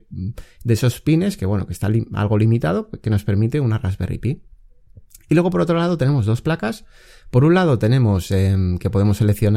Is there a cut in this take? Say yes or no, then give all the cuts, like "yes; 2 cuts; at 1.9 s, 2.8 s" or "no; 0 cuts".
no; 0 cuts